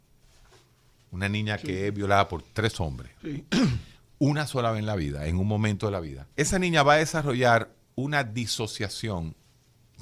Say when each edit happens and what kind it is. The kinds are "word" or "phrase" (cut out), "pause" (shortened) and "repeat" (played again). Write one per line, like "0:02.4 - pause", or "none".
0:06.3 - pause